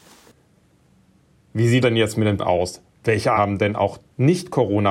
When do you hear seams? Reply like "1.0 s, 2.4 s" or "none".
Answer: 1.8 s, 2.4 s, 3.3 s